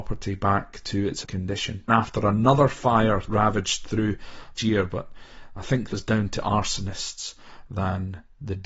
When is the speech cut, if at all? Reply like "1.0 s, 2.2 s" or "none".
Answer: 1.2 s, 1.9 s, 3.3 s, 4.6 s, 5.9 s, 7.7 s